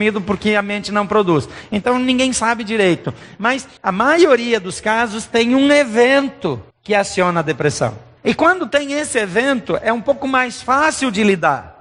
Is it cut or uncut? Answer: cut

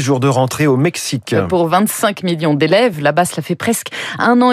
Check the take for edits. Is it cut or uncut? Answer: uncut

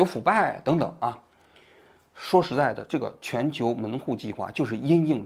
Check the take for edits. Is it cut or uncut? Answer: uncut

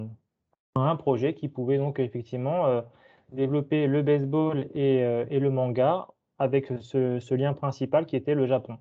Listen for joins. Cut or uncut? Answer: uncut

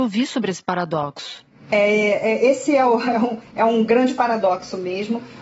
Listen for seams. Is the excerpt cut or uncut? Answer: uncut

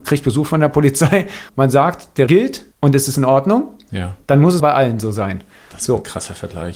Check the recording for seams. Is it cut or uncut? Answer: cut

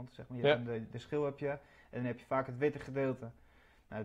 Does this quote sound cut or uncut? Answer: uncut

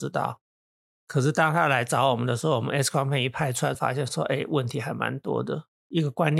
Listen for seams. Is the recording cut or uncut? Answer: cut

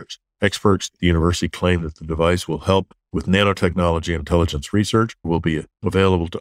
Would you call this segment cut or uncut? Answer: cut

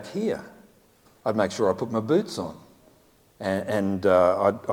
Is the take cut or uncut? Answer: uncut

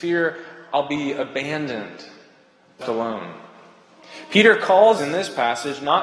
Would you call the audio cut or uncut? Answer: cut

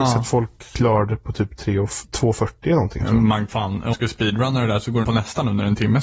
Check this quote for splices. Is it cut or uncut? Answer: cut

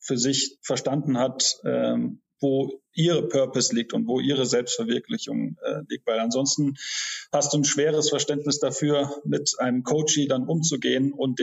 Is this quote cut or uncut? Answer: uncut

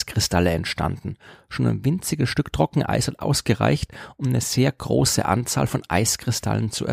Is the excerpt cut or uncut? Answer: uncut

